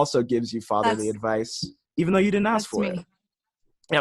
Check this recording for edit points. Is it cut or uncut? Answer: uncut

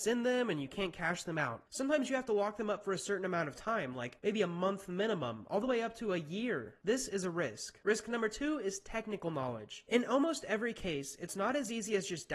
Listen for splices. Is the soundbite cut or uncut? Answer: uncut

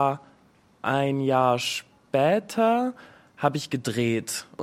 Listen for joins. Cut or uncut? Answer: uncut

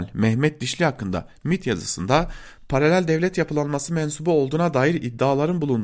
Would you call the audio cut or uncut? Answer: uncut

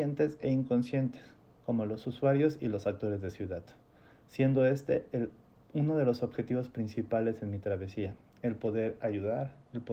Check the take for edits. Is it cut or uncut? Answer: uncut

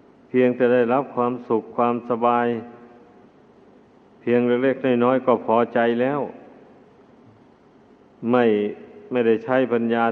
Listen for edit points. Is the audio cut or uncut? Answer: uncut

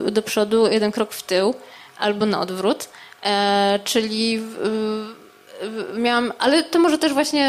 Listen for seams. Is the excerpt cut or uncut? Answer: uncut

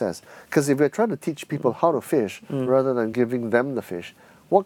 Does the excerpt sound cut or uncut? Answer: uncut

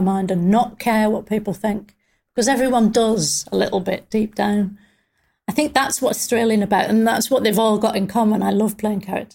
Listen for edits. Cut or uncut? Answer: uncut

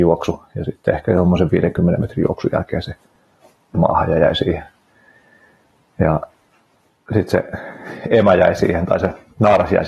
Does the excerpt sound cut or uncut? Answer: cut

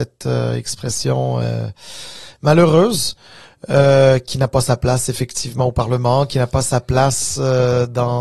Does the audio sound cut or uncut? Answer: uncut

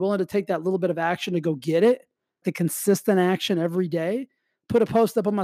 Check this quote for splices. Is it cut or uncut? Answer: cut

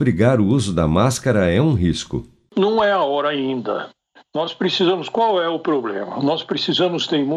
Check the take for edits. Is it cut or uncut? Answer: uncut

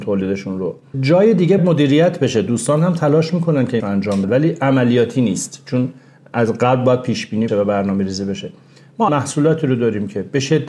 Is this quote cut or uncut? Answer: cut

